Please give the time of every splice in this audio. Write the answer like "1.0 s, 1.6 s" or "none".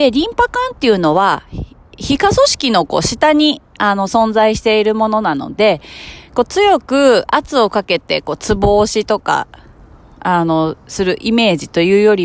none